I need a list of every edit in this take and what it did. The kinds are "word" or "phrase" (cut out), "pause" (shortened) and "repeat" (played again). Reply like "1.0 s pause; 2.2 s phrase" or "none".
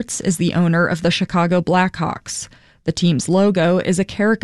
none